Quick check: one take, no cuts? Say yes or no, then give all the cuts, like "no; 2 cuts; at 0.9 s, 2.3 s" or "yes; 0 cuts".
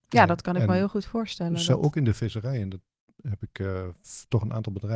yes; 0 cuts